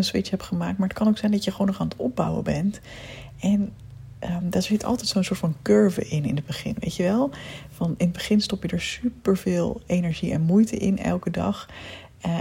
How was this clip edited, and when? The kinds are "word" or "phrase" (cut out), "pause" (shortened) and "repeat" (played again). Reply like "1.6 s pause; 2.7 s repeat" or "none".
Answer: none